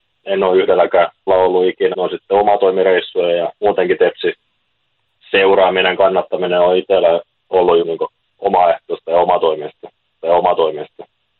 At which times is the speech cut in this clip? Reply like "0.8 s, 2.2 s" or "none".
1.3 s, 1.9 s, 3.6 s, 6.0 s, 7.8 s, 10.2 s